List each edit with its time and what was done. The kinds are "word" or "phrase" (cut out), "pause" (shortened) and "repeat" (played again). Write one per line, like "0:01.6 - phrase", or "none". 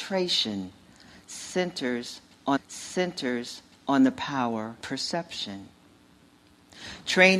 0:02.6 - repeat
0:04.8 - word